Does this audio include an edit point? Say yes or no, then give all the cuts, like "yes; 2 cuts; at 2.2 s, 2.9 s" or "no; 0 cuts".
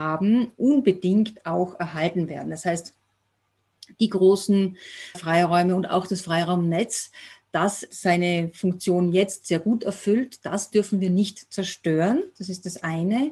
yes; 1 cut; at 5.1 s